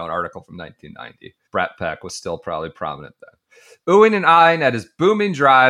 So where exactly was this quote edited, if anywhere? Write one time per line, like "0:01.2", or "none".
0:01.5